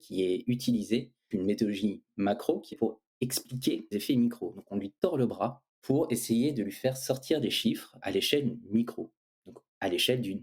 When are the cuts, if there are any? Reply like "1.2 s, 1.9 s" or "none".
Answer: 1.3 s, 2.7 s, 3.9 s, 8.0 s